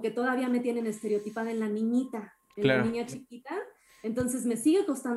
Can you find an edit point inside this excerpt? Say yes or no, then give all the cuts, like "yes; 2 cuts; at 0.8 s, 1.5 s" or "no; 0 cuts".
no; 0 cuts